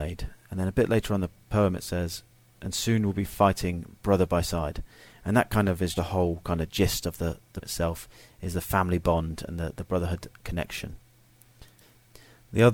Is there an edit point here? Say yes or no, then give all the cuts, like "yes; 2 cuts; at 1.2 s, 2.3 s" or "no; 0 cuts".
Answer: yes; 2 cuts; at 6.0 s, 7.6 s